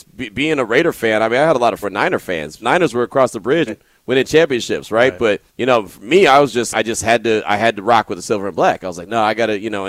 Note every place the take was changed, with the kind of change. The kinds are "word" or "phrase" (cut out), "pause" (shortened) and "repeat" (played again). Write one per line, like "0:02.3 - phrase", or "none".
0:01.8 - phrase
0:02.6 - phrase
0:03.7 - word
0:05.5 - pause
0:06.7 - word